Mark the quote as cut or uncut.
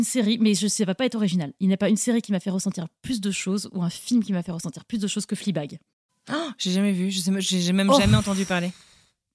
uncut